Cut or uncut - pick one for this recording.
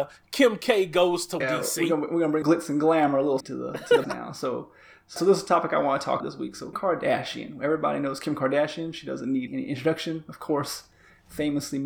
cut